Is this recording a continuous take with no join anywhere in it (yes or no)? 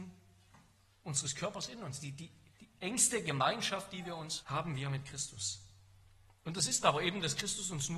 no